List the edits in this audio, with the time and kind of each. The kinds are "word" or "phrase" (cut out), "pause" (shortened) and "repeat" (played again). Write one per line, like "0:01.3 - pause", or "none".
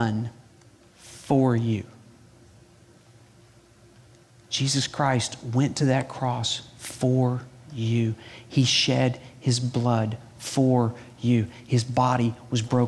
none